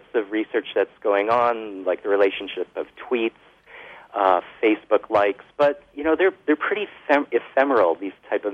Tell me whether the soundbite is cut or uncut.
uncut